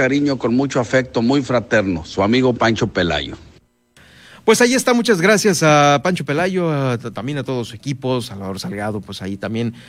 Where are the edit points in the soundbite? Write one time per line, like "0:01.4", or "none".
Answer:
none